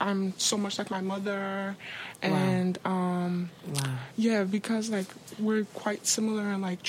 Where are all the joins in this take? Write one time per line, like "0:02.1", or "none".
none